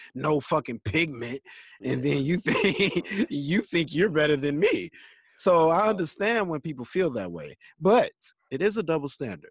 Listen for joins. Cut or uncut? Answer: uncut